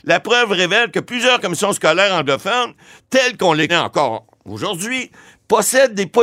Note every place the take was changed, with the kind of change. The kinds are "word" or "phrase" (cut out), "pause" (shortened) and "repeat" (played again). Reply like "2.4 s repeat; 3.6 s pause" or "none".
3.7 s word